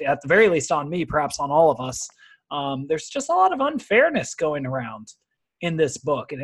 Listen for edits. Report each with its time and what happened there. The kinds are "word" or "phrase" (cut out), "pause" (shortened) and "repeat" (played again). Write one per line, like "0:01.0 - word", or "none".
none